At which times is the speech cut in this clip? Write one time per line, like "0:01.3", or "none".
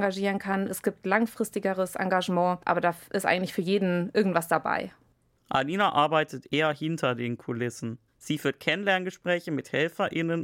0:02.6
0:08.1